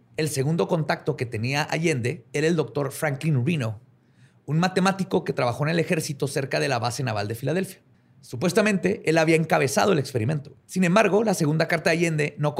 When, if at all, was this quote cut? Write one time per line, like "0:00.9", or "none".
0:07.9
0:10.6

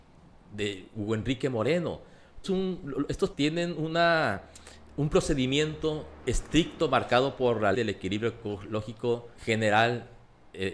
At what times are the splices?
0:02.4
0:03.3
0:06.2
0:07.7
0:09.4

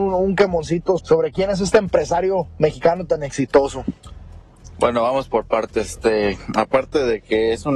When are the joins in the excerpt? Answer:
0:01.0

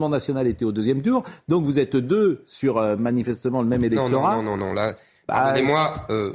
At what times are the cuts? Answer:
none

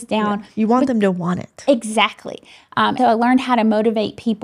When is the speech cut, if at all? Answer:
0:03.0

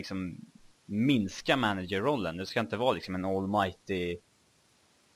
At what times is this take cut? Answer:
none

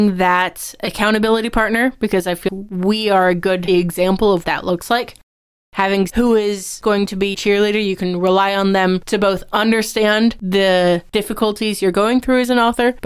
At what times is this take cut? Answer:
0:02.5
0:03.7
0:04.4
0:06.1
0:06.8
0:07.3

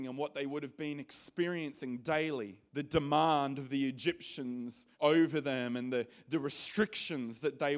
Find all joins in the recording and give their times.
0:02.7
0:04.9

